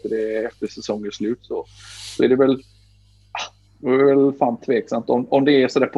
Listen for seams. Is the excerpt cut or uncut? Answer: uncut